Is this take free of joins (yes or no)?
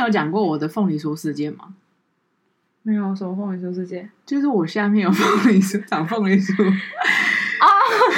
yes